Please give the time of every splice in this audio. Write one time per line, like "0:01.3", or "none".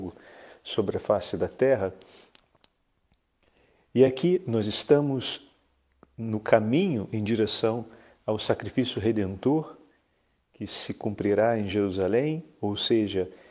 none